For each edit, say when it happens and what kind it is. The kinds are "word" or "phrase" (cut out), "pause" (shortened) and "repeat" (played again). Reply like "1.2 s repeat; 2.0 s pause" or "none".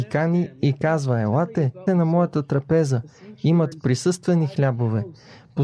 1.9 s word; 3.7 s word